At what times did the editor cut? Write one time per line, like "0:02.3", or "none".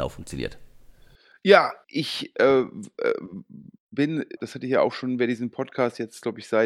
0:01.8
0:04.4